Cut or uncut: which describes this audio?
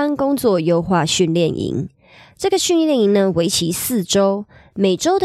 uncut